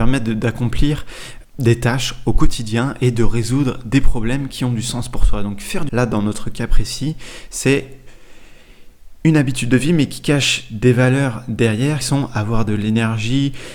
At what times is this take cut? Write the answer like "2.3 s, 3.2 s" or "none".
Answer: 1.4 s, 5.9 s, 12.0 s